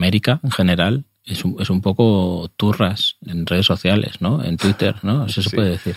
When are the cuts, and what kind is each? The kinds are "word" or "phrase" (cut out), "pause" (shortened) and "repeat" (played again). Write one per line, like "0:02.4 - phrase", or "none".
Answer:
0:03.3 - word